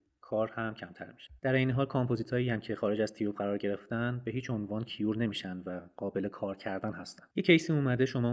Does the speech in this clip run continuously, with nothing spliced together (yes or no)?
no